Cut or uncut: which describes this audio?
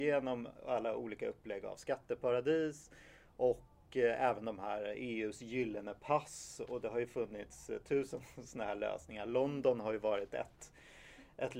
uncut